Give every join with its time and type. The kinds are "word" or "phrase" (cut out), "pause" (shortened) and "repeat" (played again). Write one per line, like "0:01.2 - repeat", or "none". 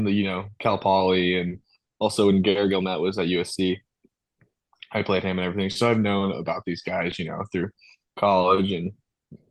none